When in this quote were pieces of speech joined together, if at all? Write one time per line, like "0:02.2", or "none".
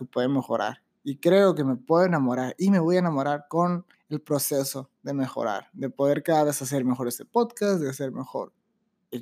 0:03.9